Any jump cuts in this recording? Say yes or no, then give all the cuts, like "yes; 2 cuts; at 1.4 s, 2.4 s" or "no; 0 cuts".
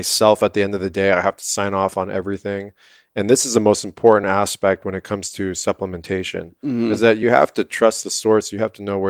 no; 0 cuts